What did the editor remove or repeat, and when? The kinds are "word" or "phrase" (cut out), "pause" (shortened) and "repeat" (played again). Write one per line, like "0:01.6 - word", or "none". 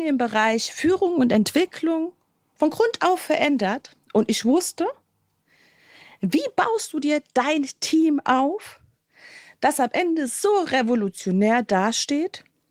none